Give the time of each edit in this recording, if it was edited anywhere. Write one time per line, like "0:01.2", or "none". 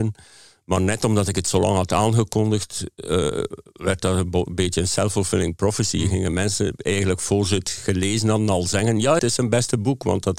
0:09.2

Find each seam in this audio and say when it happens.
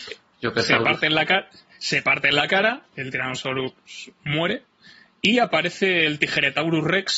none

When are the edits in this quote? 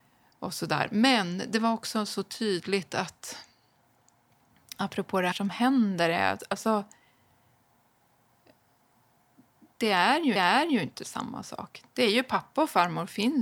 0:05.3
0:10.4

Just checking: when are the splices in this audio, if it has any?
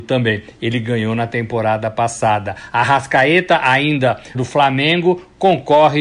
0:04.3

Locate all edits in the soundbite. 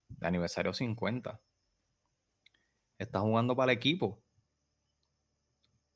none

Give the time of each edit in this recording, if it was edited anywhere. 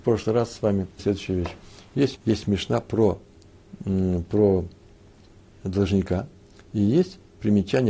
0:01.0
0:02.2

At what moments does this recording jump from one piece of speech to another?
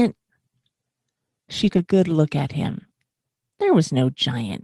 0:01.7

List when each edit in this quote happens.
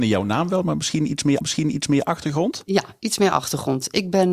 0:01.4

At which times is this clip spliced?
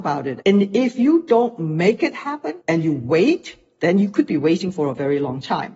0:02.6

